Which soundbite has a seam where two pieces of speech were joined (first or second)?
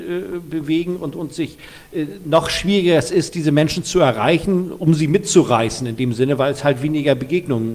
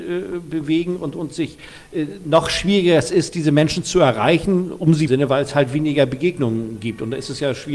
second